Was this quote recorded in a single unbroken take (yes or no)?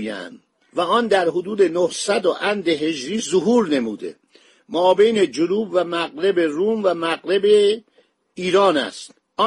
yes